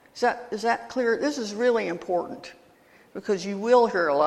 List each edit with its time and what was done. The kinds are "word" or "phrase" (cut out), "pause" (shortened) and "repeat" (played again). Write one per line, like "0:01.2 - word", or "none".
none